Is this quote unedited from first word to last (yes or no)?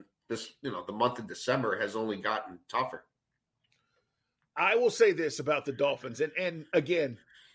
yes